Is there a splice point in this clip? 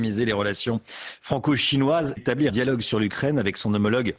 yes; 2 cuts; at 2.2 s, 2.5 s

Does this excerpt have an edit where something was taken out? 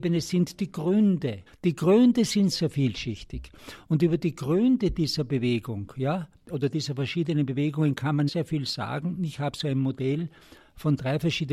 yes; 3 cuts; at 1.5 s, 2.5 s, 8.3 s

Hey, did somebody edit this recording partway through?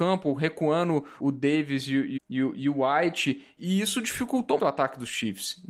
yes; 4 cuts; at 1.2 s, 2.2 s, 3.6 s, 4.6 s

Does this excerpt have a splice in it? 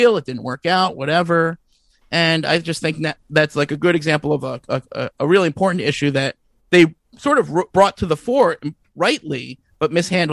yes; 1 cut; at 7.7 s

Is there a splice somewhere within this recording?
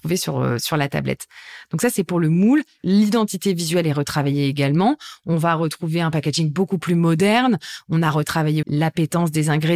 yes; 1 cut; at 8.6 s

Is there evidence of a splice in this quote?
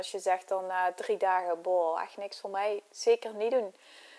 no; 0 cuts

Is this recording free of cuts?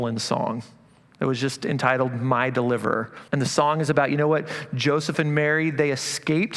no; 1 cut; at 3.3 s

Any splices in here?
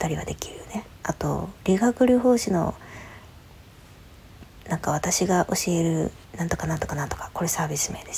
yes; 2 cuts; at 0.9 s, 6.2 s

